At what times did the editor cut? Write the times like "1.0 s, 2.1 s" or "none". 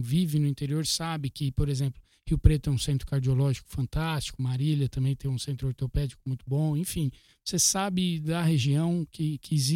none

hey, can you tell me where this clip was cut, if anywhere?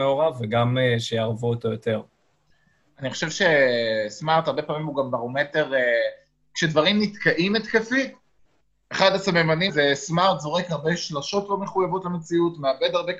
9.7 s

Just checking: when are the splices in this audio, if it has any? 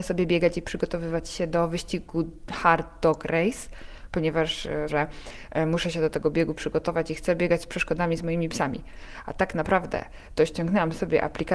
4.9 s

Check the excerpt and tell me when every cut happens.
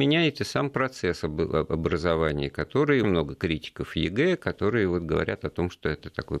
3.0 s

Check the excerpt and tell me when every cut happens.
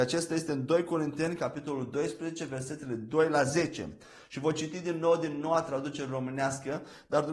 none

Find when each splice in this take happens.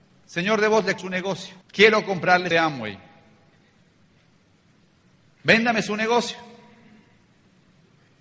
1.0 s, 1.6 s, 2.5 s

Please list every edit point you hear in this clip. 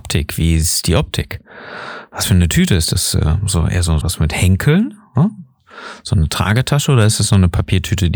2.2 s, 4.0 s

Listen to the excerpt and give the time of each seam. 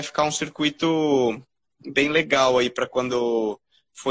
none

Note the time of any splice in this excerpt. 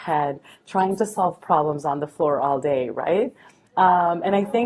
none

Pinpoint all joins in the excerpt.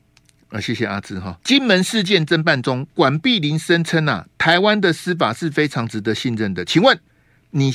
1.4 s

